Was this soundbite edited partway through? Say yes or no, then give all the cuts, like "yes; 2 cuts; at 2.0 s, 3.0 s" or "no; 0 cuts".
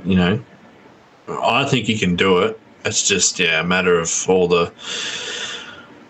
no; 0 cuts